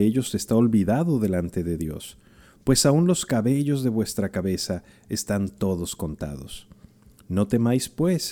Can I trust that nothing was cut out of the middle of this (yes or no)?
yes